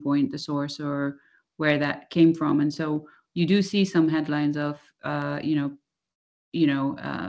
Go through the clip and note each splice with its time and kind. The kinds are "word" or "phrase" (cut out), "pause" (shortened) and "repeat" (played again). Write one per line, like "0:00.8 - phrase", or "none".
none